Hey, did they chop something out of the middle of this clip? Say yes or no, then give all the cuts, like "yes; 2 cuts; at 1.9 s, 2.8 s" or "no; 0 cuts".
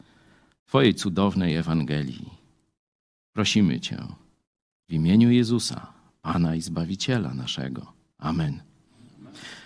no; 0 cuts